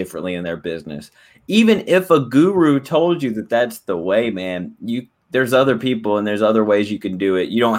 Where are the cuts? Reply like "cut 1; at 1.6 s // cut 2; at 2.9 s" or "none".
none